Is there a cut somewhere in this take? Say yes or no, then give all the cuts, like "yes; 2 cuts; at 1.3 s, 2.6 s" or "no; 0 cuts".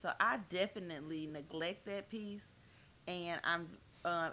no; 0 cuts